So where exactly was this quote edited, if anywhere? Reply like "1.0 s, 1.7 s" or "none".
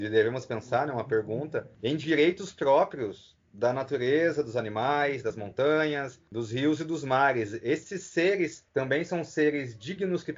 1.7 s, 6.3 s, 8.7 s